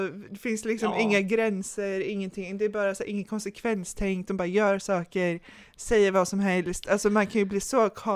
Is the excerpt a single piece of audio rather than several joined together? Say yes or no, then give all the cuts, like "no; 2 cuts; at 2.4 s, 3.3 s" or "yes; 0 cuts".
yes; 0 cuts